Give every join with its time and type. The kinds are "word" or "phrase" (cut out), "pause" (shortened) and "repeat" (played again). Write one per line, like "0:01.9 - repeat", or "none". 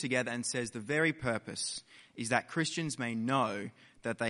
none